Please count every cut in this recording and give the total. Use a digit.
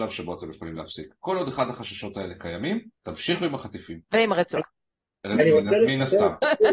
2